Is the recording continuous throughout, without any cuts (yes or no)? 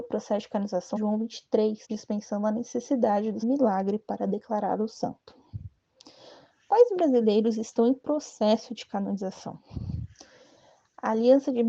no